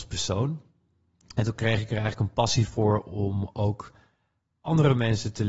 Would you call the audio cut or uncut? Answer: uncut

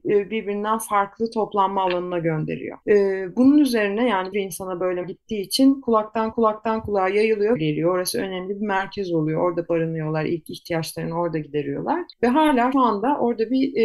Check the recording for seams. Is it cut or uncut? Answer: cut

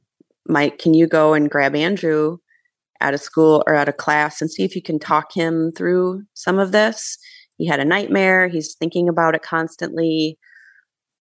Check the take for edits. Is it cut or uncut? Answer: uncut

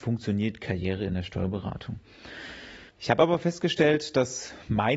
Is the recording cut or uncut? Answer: cut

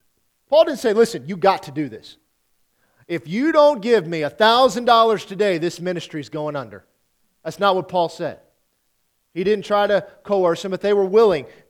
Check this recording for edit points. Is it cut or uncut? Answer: uncut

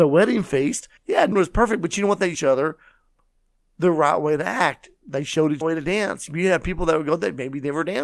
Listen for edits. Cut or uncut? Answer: cut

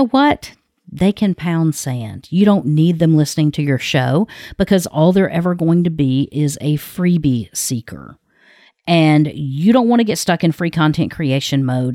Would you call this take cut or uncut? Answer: uncut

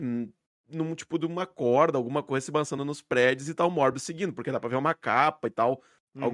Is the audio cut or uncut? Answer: uncut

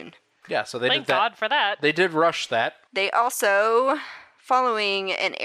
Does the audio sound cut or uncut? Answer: uncut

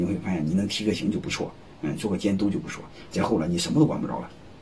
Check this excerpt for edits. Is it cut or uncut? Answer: uncut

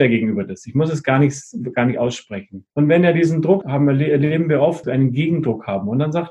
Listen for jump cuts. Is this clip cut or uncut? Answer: cut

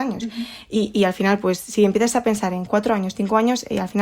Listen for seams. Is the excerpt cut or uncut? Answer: uncut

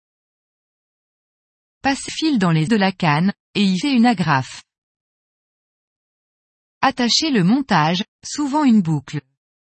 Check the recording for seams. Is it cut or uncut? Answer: cut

